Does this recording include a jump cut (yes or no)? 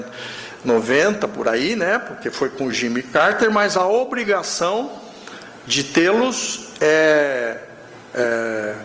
no